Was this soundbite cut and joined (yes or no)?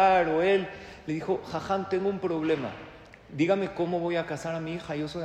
no